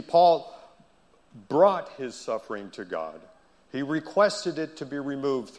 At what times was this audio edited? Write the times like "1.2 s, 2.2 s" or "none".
none